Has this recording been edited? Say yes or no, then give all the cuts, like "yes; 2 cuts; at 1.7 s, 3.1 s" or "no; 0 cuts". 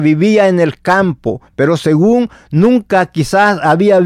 no; 0 cuts